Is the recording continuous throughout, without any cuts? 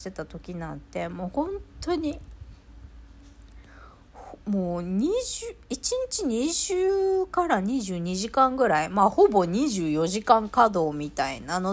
no; 1 cut; at 4.4 s

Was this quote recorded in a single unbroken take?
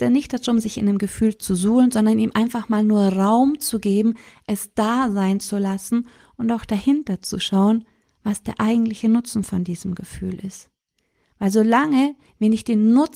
yes; 0 cuts

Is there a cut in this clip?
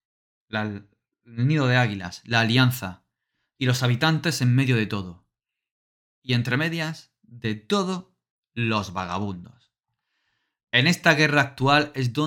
no; 0 cuts

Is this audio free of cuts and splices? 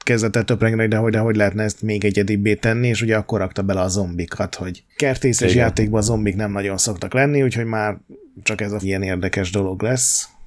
no; 3 cuts; at 1.1 s, 4.9 s, 8.8 s

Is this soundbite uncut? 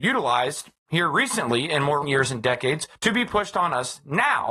no; 1 cut; at 2.0 s

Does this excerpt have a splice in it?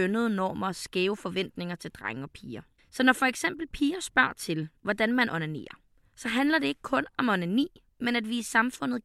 no; 0 cuts

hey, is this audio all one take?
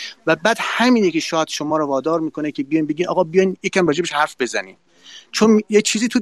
yes; 0 cuts

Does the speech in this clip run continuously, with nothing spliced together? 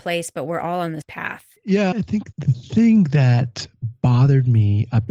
no; 3 cuts; at 1.0 s, 1.9 s, 2.3 s

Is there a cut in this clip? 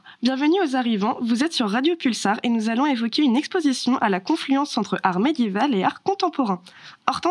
no; 0 cuts

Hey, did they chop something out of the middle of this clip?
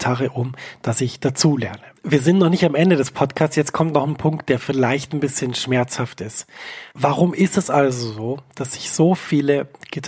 yes; 2 cuts; at 2.0 s, 6.9 s

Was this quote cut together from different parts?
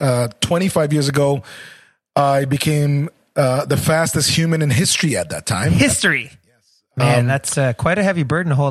no; 0 cuts

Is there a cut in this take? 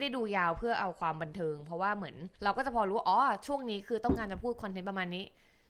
yes; 1 cut; at 2.3 s

